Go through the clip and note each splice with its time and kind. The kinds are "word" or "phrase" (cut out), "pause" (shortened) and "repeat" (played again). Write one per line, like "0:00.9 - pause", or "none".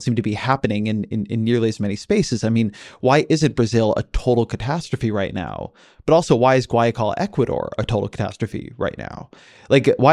none